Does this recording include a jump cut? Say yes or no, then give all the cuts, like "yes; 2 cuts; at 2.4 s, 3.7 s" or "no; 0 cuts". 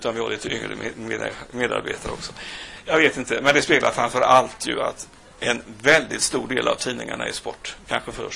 no; 0 cuts